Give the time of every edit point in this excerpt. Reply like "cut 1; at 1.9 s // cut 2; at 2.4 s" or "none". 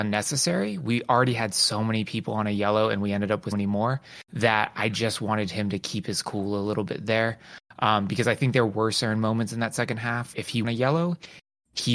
cut 1; at 3.5 s // cut 2; at 4.2 s // cut 3; at 10.3 s // cut 4; at 10.6 s